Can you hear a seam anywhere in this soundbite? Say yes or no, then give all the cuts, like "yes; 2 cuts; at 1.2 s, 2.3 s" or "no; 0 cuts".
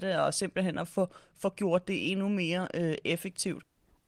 no; 0 cuts